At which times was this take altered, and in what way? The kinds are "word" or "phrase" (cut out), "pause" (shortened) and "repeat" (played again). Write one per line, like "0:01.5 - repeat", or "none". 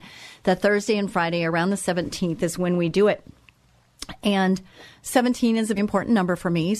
0:05.8 - word